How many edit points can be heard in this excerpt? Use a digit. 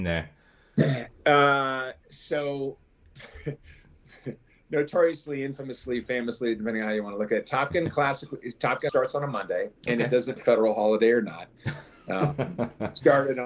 4